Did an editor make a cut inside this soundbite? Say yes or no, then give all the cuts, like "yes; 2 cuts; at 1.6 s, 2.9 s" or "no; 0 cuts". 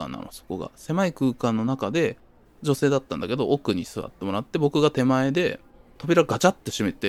no; 0 cuts